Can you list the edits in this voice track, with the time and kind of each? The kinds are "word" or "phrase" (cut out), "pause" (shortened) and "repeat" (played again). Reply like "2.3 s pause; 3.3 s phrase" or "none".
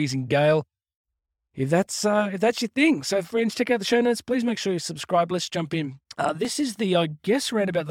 6.1 s pause